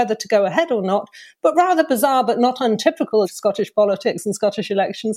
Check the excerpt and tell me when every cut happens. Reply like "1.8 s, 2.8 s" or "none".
3.2 s